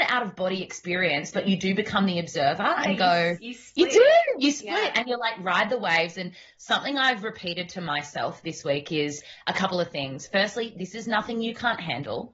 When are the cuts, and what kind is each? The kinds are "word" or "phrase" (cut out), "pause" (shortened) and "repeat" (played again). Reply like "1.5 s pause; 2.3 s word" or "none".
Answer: none

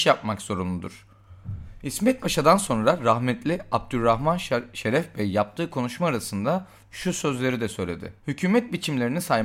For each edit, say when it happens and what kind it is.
8.2 s pause

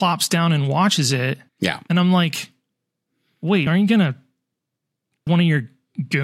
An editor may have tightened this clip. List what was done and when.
1.5 s pause; 3.7 s word; 5.3 s word

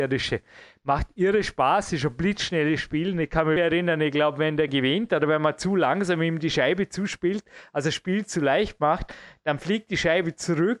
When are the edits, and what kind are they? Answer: 3.6 s word; 4.7 s word

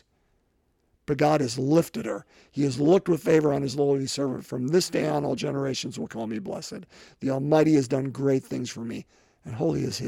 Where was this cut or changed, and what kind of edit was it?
none

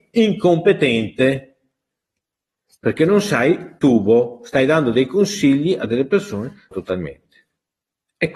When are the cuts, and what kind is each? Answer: 3.8 s word; 6.7 s word

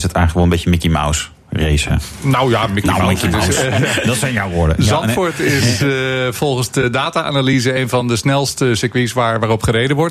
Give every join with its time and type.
none

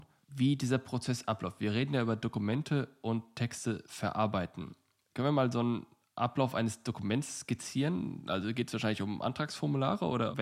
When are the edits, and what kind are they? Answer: none

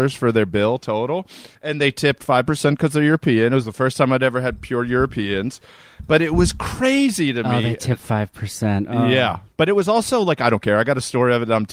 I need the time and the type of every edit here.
1.5 s pause

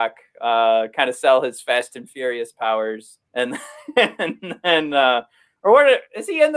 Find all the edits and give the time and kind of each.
3.3 s pause

